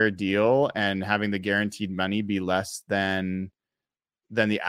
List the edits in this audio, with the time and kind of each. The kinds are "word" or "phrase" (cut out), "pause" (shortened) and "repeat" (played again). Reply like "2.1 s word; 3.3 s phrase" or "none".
none

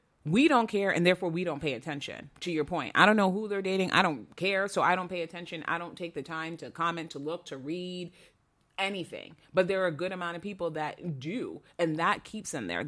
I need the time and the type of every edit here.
none

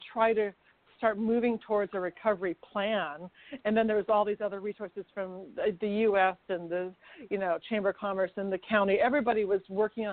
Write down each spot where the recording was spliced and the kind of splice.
none

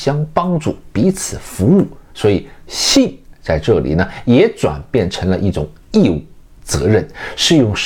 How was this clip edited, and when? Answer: none

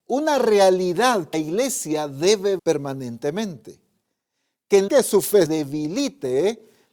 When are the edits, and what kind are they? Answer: 1.3 s word; 2.6 s word; 4.9 s word; 5.5 s word

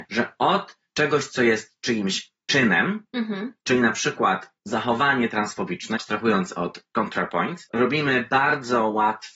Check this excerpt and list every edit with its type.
3.6 s pause; 4.6 s pause

